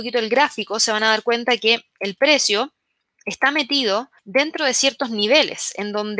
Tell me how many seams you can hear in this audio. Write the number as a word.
one